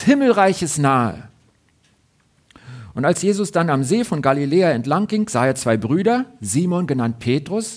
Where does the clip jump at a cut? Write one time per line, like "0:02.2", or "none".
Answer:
none